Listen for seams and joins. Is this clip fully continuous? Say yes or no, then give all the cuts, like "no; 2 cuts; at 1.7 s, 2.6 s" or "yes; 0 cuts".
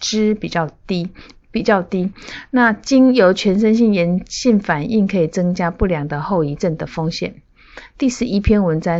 yes; 0 cuts